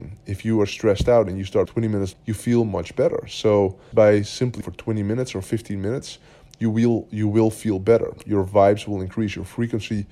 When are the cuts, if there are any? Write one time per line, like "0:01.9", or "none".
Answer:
0:01.7
0:02.1
0:03.9
0:04.6